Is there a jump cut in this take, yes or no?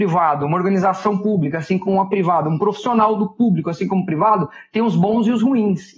no